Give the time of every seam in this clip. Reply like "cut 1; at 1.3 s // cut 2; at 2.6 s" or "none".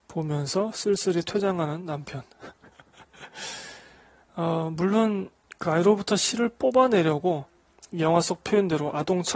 cut 1; at 5.4 s